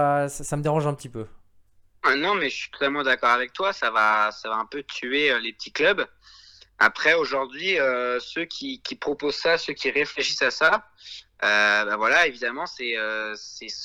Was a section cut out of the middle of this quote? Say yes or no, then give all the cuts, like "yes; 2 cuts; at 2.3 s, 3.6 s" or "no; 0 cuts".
no; 0 cuts